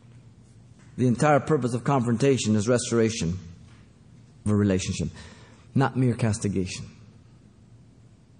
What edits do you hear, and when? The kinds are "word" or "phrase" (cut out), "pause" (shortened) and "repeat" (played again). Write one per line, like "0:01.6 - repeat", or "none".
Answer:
0:04.5 - word